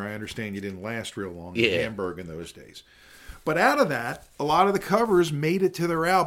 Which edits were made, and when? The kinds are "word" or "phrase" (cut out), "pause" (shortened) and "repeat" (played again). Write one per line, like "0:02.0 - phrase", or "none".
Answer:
none